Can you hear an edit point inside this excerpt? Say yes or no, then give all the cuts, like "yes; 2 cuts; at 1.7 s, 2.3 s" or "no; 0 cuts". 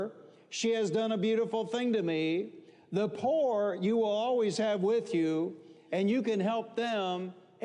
no; 0 cuts